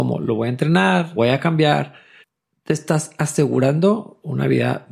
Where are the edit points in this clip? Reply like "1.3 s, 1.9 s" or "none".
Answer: 1.2 s, 2.2 s